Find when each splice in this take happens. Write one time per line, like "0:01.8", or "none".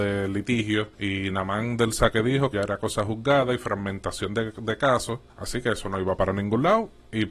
0:00.9
0:02.5
0:05.3